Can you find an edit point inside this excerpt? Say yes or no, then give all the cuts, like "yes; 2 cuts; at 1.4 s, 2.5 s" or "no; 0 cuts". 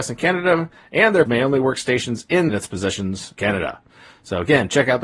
yes; 3 cuts; at 1.3 s, 2.5 s, 3.4 s